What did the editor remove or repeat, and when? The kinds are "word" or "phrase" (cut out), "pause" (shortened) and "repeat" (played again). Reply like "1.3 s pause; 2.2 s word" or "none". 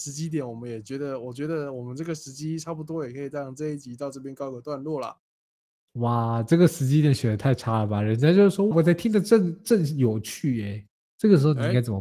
8.7 s word